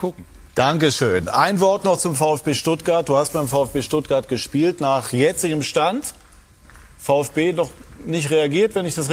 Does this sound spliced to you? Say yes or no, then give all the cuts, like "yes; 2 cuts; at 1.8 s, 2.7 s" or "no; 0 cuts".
no; 0 cuts